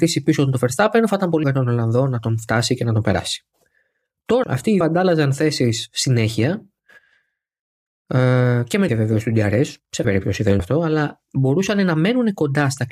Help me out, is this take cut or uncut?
cut